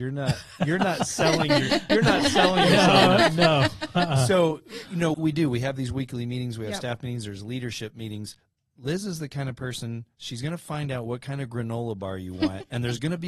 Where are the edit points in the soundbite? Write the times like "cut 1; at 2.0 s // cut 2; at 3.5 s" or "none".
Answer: cut 1; at 5.1 s